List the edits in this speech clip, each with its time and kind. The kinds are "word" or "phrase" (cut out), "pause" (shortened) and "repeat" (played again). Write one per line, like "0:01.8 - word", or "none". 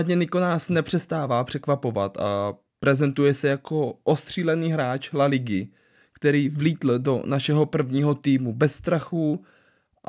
0:02.7 - pause